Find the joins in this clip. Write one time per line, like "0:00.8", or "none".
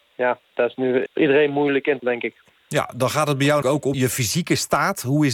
0:01.1
0:02.0
0:03.6
0:03.9